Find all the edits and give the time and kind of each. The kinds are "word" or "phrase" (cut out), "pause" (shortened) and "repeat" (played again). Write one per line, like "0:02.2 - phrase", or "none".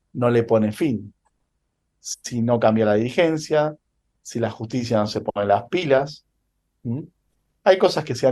none